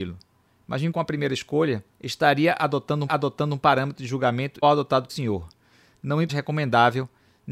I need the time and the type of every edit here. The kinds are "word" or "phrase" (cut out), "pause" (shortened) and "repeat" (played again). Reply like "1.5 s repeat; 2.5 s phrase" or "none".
0.9 s phrase; 1.9 s pause; 3.1 s repeat; 4.6 s word; 5.1 s word; 6.3 s phrase